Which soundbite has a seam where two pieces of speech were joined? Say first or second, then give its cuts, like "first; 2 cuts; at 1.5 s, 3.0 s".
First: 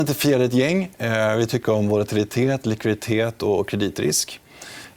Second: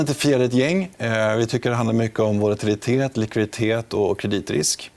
first; 1 cut; at 1.6 s